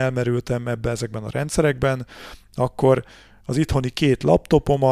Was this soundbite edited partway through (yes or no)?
no